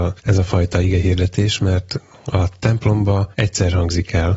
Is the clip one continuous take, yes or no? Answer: yes